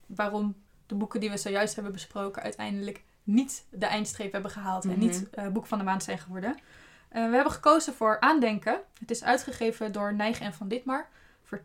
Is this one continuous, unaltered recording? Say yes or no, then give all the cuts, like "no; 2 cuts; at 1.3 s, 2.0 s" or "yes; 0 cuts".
yes; 0 cuts